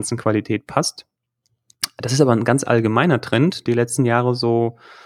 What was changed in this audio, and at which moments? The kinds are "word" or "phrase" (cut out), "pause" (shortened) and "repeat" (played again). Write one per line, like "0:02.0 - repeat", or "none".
0:03.7 - word